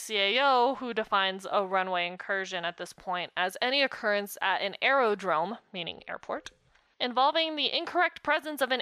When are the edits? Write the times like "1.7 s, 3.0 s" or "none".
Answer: none